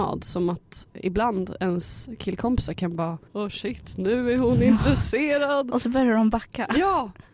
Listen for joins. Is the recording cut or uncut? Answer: cut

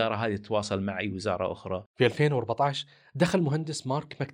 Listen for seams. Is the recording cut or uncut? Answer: cut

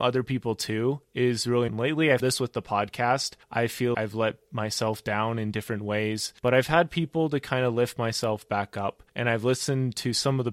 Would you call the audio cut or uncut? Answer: cut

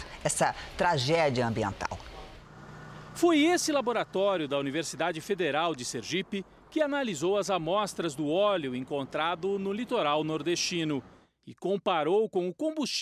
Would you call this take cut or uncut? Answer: uncut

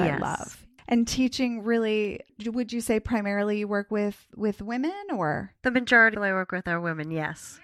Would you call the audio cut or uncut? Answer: cut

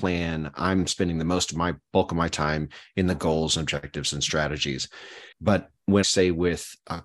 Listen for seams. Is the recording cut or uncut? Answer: cut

